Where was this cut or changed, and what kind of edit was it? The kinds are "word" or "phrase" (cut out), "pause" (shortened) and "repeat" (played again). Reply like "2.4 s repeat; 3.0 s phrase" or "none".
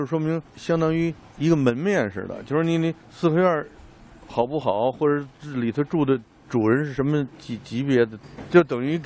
3.0 s pause